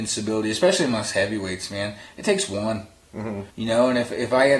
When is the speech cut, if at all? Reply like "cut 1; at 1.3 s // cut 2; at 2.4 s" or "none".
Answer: cut 1; at 3.5 s